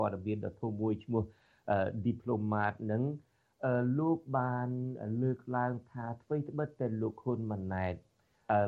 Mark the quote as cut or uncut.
uncut